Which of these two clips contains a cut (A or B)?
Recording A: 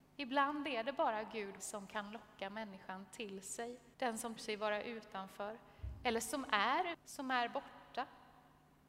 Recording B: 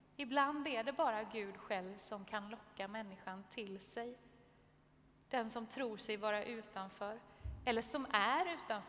A